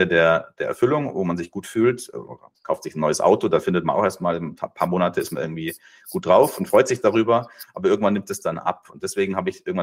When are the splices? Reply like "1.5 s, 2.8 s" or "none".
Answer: none